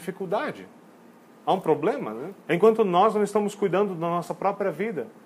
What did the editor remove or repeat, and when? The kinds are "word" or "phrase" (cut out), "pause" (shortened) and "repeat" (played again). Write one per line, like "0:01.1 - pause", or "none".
0:02.4 - pause